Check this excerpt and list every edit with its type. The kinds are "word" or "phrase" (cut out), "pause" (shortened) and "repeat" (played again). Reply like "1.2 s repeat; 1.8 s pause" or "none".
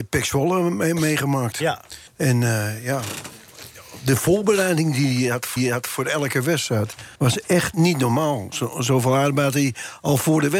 2.1 s pause; 5.6 s repeat; 7.2 s pause; 7.7 s word